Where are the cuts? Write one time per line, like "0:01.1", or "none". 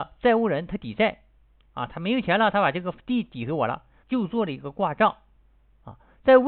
0:04.0